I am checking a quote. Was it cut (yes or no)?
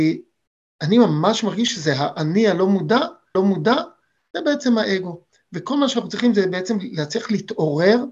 yes